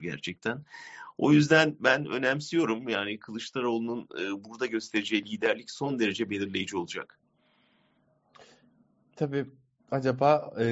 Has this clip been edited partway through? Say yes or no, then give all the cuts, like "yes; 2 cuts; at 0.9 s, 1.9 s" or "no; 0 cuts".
no; 0 cuts